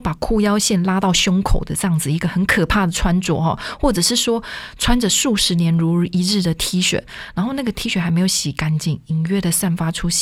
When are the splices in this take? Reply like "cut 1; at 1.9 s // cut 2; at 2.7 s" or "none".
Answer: none